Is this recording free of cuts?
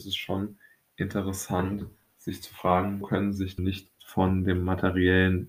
no; 3 cuts; at 3.0 s, 3.6 s, 3.9 s

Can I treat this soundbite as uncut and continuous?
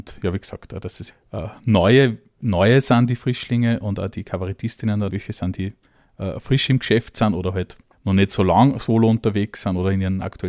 no; 3 cuts; at 1.1 s, 5.1 s, 7.9 s

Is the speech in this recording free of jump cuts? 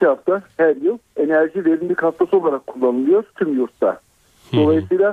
no; 2 cuts; at 1.0 s, 3.3 s

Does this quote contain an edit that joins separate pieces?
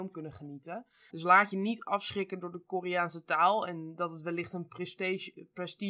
yes; 1 cut; at 1.1 s

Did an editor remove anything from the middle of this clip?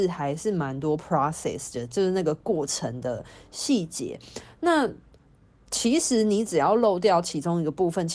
no; 0 cuts

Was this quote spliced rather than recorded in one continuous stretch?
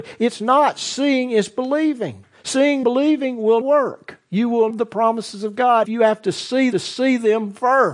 yes; 5 cuts; at 2.8 s, 3.6 s, 4.7 s, 5.8 s, 6.7 s

